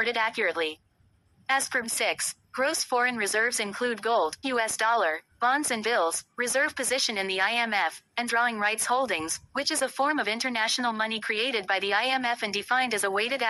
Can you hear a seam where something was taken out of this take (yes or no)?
yes